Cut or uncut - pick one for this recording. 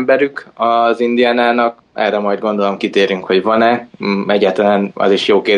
uncut